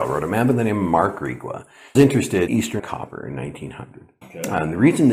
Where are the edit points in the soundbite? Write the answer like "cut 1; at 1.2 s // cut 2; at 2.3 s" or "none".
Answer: cut 1; at 1.9 s // cut 2; at 2.5 s // cut 3; at 2.8 s // cut 4; at 4.2 s